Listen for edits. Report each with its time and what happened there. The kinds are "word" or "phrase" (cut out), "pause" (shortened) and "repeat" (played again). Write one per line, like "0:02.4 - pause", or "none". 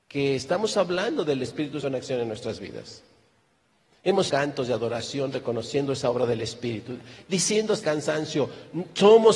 0:01.8 - word
0:04.3 - phrase
0:07.8 - word